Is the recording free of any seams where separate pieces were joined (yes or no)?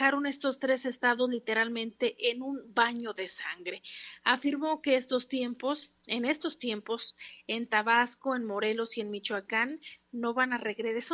yes